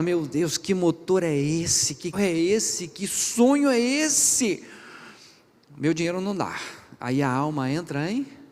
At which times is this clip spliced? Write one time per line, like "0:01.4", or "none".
0:02.1